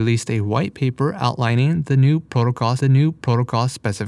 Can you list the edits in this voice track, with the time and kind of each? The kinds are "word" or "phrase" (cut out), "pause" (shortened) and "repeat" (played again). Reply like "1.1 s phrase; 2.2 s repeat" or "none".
2.8 s repeat